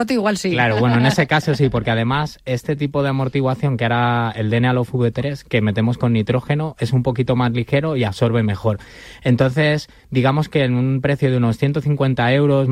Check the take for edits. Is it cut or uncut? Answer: uncut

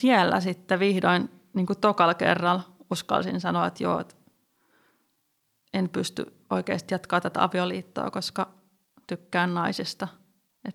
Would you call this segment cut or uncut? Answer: uncut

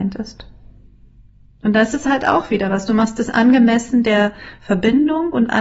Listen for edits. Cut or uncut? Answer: uncut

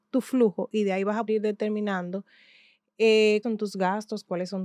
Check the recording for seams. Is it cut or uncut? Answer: cut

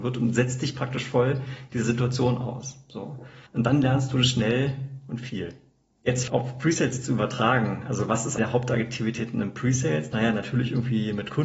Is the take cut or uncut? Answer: cut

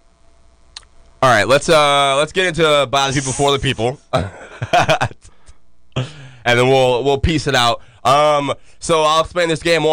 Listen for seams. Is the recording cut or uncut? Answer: uncut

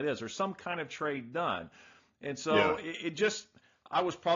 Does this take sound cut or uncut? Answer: uncut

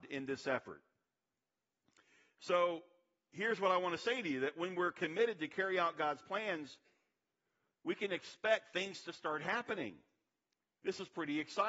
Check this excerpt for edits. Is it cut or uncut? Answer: uncut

